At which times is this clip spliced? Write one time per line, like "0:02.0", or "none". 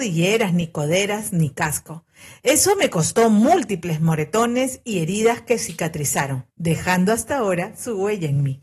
none